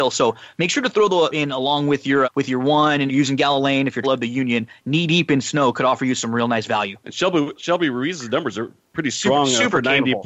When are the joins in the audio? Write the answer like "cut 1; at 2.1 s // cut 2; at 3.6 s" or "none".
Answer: cut 1; at 1.3 s // cut 2; at 2.2 s // cut 3; at 3.1 s // cut 4; at 4.0 s // cut 5; at 7.0 s